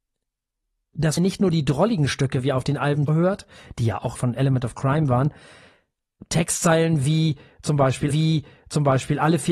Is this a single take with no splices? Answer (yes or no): no